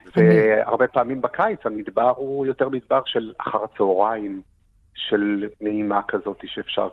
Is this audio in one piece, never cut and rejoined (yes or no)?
no